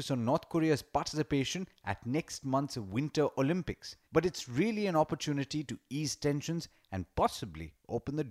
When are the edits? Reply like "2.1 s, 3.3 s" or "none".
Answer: 4.0 s